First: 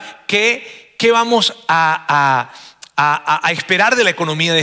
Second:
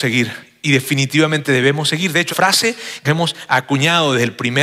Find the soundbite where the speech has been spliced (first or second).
second